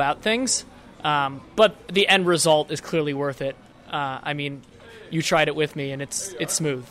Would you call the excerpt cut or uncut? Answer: uncut